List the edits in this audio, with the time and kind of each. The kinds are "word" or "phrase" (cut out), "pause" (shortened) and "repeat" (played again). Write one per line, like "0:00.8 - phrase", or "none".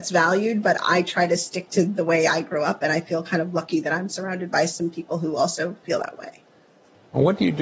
none